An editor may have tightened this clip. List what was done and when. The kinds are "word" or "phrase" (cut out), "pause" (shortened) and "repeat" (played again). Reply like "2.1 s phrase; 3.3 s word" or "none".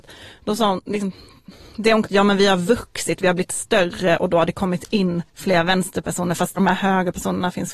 2.0 s phrase; 5.3 s pause; 6.6 s word